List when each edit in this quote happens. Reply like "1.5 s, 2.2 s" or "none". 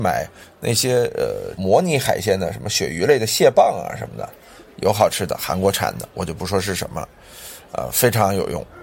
none